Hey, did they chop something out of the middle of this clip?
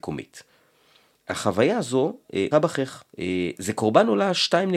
yes; 2 cuts; at 2.5 s, 3.1 s

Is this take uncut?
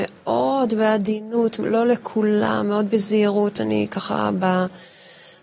yes; 0 cuts

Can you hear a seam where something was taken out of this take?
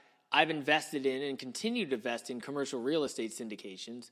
no; 0 cuts

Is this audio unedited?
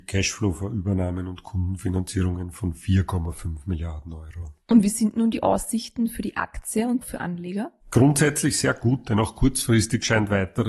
no; 3 cuts; at 4.6 s, 7.0 s, 7.8 s

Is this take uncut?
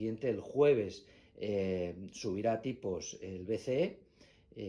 yes; 0 cuts

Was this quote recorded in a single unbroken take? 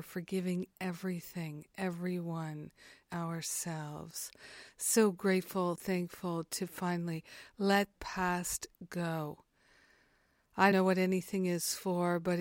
no; 4 cuts; at 3.0 s, 5.7 s, 8.0 s, 10.7 s

